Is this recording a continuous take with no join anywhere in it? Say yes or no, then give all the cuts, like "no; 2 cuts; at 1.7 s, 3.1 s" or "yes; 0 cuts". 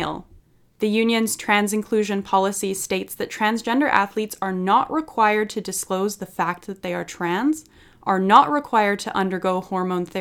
yes; 0 cuts